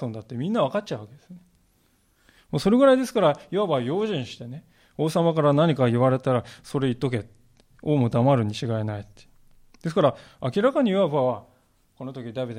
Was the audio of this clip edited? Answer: no; 0 cuts

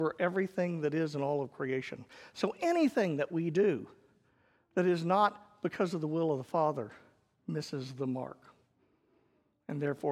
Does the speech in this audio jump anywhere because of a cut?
no; 0 cuts

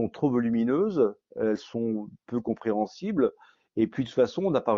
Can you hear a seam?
no; 0 cuts

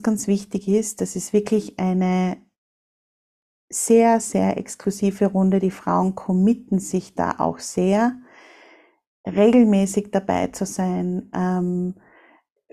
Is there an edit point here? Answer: no; 0 cuts

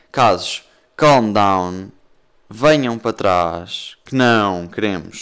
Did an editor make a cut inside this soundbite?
no; 0 cuts

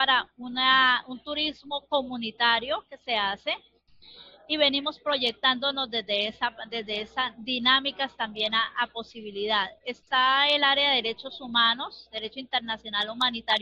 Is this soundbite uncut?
yes; 0 cuts

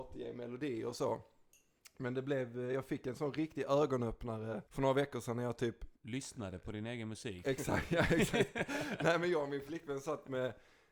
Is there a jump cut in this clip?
yes; 2 cuts; at 4.7 s, 6.0 s

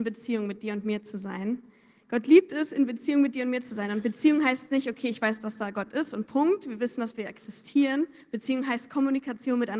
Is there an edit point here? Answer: yes; 1 cut; at 8.2 s

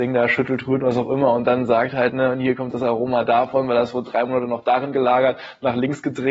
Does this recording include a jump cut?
no; 0 cuts

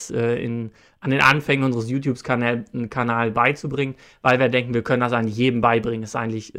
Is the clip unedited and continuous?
yes; 0 cuts

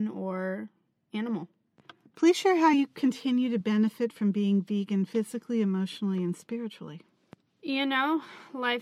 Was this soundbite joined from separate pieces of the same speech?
no; 0 cuts

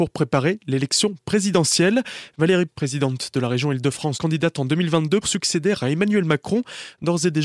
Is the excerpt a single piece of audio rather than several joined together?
no; 3 cuts; at 2.7 s, 4.1 s, 5.2 s

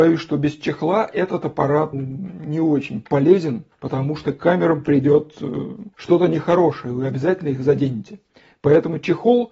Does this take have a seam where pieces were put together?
yes; 3 cuts; at 1.9 s, 3.7 s, 5.9 s

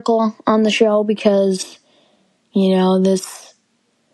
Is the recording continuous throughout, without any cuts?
yes; 0 cuts

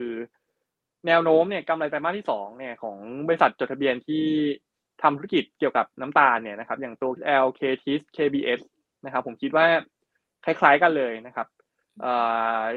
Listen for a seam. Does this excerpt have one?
yes; 1 cut; at 7.2 s

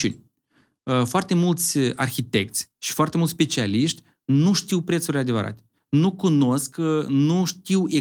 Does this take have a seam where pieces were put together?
no; 0 cuts

